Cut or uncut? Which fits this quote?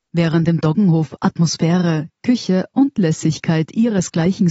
uncut